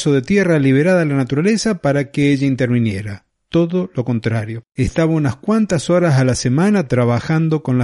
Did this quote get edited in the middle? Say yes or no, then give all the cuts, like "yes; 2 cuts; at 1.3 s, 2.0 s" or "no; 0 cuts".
yes; 2 cuts; at 3.3 s, 4.7 s